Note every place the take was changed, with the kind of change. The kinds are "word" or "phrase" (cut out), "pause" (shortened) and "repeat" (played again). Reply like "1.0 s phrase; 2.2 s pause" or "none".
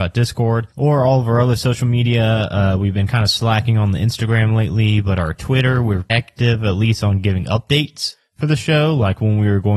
6.1 s word